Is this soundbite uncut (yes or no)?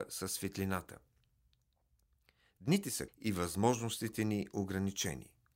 no